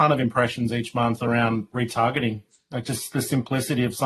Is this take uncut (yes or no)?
yes